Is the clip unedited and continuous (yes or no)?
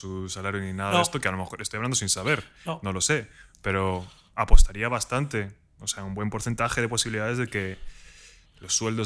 yes